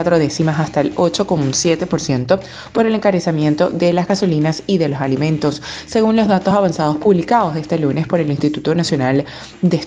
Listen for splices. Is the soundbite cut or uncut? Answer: uncut